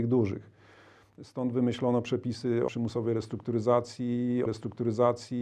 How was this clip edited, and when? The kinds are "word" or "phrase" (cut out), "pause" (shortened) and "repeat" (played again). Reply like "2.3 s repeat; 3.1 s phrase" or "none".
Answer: 2.7 s word; 4.5 s repeat